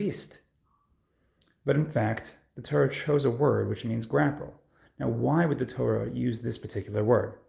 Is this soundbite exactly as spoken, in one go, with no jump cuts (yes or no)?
yes